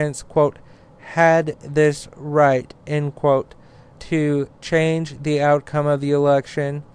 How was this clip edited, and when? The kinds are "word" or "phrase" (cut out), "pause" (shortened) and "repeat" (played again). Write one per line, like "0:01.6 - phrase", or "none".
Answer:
0:03.9 - word